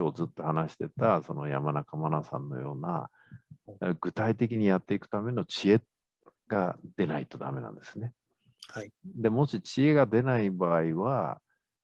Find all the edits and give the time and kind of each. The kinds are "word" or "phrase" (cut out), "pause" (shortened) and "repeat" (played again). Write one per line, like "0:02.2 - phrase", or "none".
none